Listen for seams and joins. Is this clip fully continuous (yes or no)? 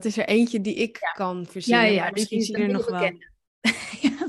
no